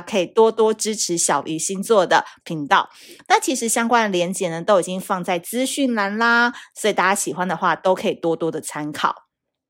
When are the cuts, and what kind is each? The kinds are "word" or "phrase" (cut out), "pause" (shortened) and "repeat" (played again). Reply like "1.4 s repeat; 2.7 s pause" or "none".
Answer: 2.4 s word